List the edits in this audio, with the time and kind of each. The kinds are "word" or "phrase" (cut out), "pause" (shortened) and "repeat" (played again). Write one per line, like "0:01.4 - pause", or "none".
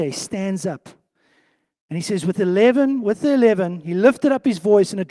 none